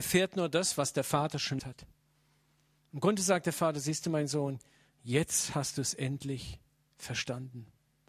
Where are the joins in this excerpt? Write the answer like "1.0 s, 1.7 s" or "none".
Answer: 1.6 s